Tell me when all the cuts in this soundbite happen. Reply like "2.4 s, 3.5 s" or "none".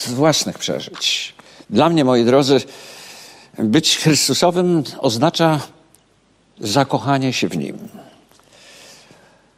none